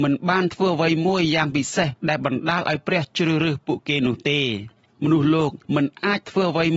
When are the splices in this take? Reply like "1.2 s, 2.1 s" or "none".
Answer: 2.0 s, 4.9 s, 5.6 s